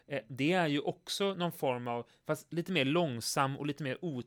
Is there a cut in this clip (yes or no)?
no